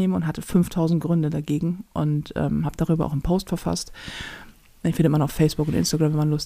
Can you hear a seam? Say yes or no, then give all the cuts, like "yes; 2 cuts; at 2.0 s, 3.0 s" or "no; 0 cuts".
no; 0 cuts